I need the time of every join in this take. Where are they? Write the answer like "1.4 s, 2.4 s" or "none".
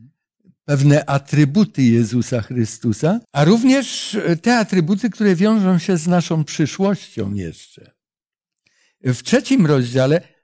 3.2 s